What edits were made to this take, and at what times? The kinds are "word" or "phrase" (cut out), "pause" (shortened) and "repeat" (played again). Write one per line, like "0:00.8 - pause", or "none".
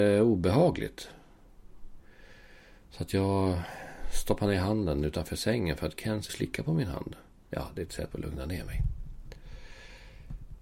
0:06.3 - word
0:08.1 - word